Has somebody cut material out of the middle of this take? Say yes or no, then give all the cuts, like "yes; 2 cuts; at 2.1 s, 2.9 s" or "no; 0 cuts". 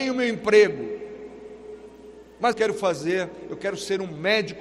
yes; 1 cut; at 2.5 s